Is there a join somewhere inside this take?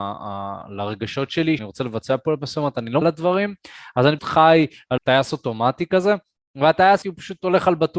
yes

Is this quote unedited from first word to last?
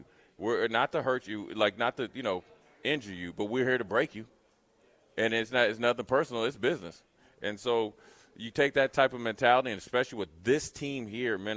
yes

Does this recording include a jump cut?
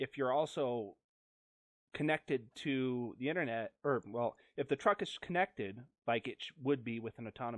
no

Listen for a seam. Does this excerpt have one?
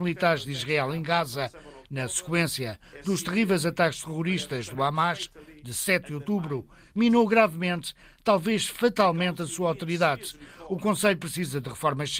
no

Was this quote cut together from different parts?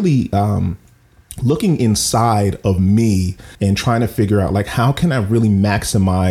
yes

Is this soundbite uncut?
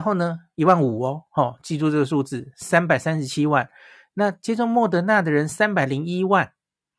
yes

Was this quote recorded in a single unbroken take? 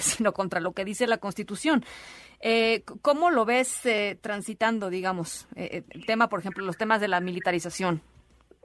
yes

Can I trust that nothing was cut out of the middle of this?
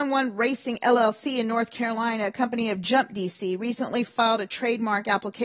yes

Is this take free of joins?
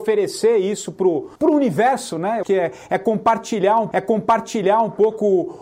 no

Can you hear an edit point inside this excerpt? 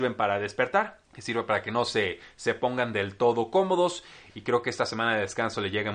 yes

